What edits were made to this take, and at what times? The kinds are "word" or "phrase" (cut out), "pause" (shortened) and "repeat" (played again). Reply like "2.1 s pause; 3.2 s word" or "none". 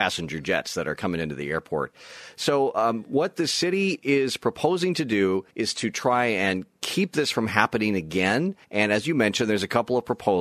5.5 s pause; 8.6 s pause